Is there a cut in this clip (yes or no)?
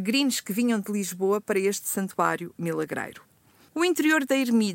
no